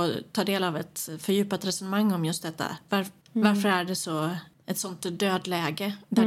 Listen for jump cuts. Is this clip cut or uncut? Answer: cut